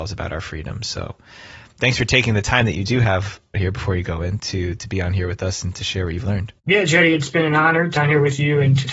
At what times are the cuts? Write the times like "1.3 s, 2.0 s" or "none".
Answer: 3.5 s, 8.0 s